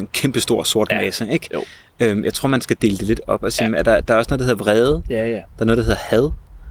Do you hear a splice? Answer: no; 0 cuts

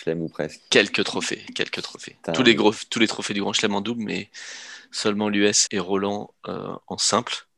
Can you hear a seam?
yes; 1 cut; at 5.7 s

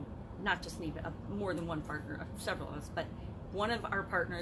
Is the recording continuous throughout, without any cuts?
yes; 0 cuts

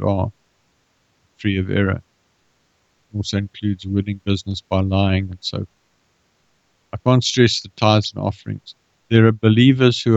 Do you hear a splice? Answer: no; 0 cuts

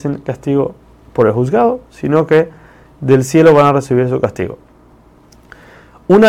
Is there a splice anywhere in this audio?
no; 0 cuts

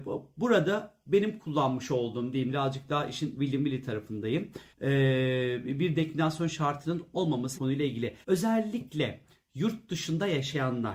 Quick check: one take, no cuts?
no; 4 cuts; at 2.5 s, 4.7 s, 7.6 s, 8.2 s

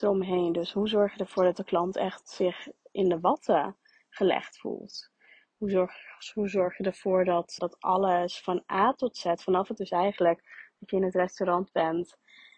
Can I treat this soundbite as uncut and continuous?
no; 2 cuts; at 7.6 s, 9.8 s

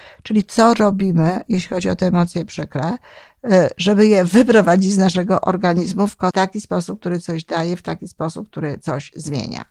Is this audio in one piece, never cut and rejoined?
no; 1 cut; at 6.3 s

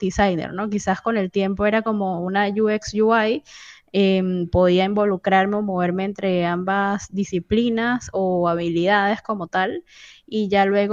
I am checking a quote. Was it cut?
no; 0 cuts

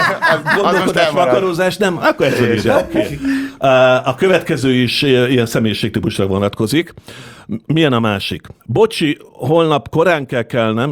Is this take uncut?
no; 1 cut; at 8.6 s

